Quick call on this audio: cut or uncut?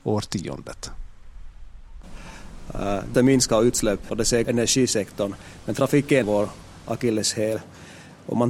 cut